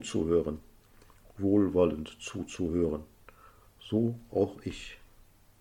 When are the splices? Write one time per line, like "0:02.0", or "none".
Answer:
none